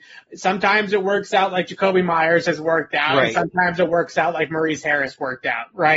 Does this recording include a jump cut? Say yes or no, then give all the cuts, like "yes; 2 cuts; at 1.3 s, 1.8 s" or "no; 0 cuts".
no; 0 cuts